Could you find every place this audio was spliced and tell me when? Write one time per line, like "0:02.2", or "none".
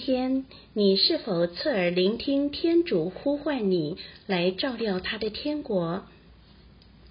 none